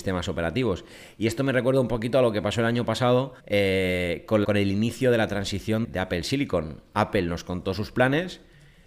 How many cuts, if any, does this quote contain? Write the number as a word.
three